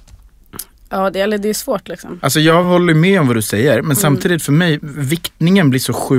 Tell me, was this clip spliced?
no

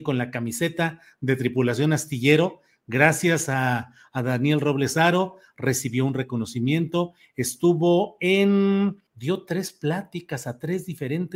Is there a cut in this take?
yes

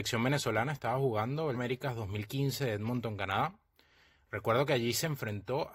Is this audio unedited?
no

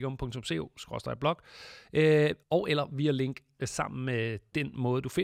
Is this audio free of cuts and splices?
no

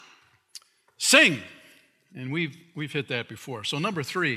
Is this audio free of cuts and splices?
yes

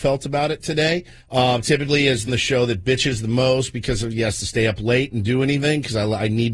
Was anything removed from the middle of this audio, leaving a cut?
yes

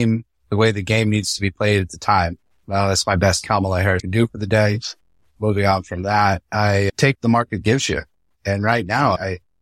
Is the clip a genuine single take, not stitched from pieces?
no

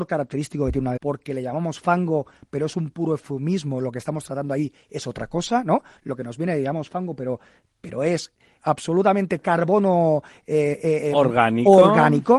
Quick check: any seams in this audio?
yes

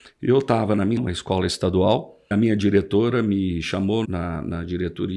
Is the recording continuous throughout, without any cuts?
no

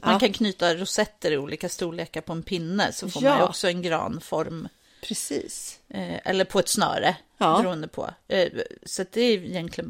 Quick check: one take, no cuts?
yes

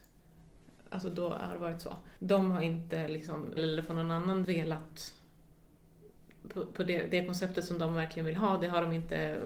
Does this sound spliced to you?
yes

